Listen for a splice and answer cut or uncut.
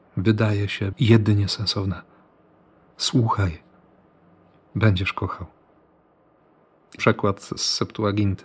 cut